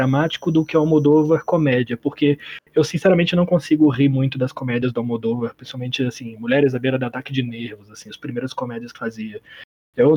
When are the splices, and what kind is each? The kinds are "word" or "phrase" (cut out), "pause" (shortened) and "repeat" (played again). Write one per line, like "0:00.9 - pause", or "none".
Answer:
0:08.9 - word